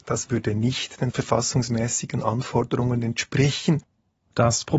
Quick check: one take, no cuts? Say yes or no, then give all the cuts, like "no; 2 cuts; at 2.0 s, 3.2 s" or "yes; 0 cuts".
yes; 0 cuts